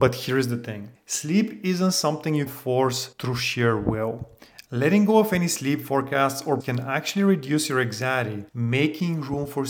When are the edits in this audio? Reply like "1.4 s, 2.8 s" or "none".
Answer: 0.9 s, 2.5 s, 3.1 s, 6.6 s, 8.5 s